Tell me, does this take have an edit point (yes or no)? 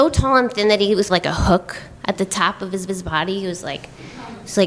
yes